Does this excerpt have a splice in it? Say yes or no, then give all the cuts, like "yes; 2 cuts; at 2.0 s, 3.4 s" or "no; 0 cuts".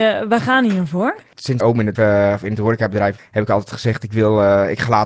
yes; 3 cuts; at 1.6 s, 1.9 s, 3.2 s